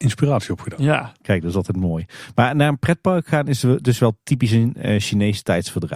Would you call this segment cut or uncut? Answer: uncut